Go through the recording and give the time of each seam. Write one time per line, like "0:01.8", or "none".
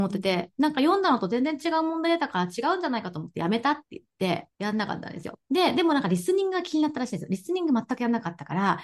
0:04.5
0:05.4